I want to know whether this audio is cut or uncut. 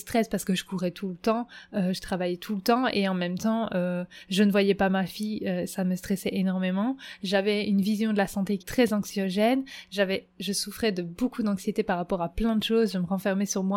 cut